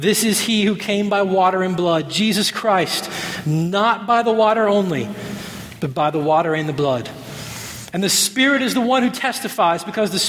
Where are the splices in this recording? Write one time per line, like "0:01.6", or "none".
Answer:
none